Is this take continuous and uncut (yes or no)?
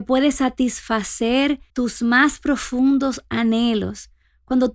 no